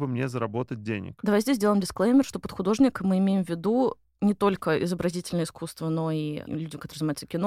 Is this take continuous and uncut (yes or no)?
yes